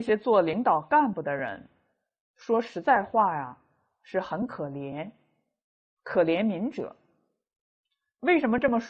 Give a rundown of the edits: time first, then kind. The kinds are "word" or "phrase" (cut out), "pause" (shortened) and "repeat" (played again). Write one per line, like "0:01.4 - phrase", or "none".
none